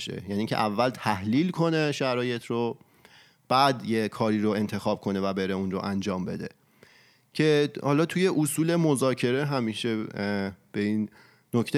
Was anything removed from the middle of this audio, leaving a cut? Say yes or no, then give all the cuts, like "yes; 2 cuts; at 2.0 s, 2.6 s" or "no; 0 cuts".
no; 0 cuts